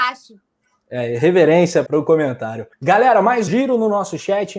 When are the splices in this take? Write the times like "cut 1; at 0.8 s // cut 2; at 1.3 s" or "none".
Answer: cut 1; at 1.9 s // cut 2; at 2.7 s // cut 3; at 3.5 s